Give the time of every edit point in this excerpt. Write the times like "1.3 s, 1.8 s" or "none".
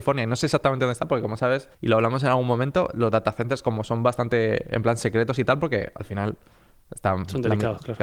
1.7 s

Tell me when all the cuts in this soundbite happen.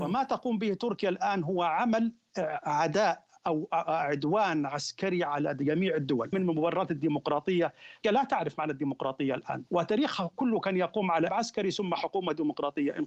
6.3 s, 8.0 s, 9.7 s, 11.3 s

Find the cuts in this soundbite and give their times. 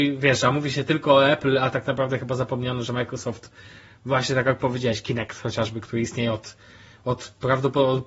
none

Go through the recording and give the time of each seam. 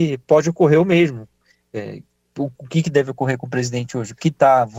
none

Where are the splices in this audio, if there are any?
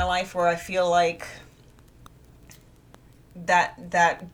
none

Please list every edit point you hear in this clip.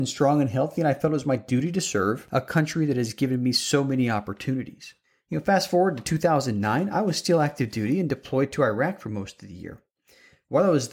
none

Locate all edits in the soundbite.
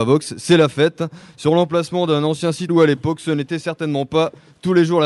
2.7 s

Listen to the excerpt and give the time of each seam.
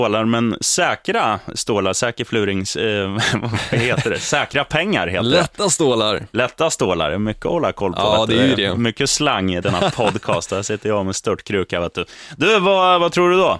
9.6 s

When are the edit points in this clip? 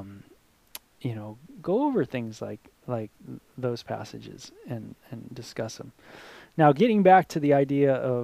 none

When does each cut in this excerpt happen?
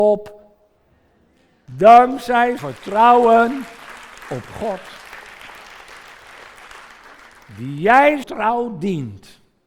2.6 s, 8.2 s

